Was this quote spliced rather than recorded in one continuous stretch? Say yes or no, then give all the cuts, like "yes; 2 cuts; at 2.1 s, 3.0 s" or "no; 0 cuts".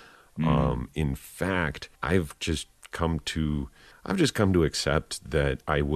yes; 2 cuts; at 2.0 s, 3.9 s